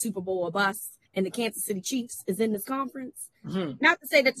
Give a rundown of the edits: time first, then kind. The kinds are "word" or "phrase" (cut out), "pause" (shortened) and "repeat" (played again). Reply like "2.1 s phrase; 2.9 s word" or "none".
1.1 s pause; 3.4 s pause